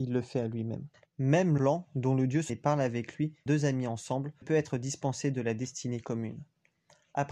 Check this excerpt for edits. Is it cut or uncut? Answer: cut